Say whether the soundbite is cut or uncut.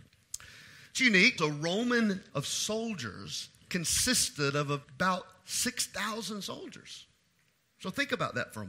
cut